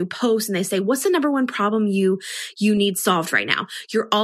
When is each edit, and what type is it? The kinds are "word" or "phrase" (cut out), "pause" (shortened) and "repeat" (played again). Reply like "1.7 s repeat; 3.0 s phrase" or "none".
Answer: none